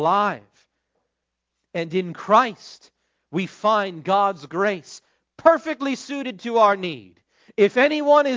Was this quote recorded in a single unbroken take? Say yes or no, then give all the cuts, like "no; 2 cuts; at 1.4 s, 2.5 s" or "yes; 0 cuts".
yes; 0 cuts